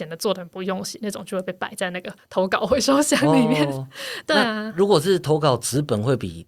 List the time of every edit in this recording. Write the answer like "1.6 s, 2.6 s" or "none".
none